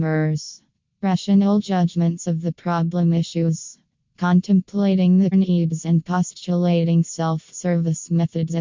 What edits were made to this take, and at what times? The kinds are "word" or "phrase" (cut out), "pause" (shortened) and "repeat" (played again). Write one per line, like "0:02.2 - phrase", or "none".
0:05.3 - word